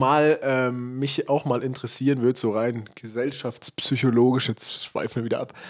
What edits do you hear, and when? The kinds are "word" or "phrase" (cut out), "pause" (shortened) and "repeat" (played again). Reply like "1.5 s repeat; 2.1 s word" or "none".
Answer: none